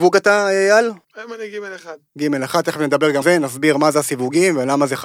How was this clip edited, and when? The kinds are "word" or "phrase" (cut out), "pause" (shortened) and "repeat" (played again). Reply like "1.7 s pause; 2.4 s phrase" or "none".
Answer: 1.0 s pause; 3.2 s word